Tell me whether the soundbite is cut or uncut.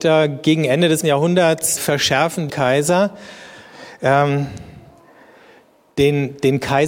cut